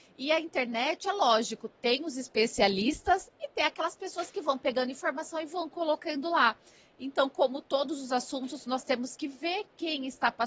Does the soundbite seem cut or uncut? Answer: uncut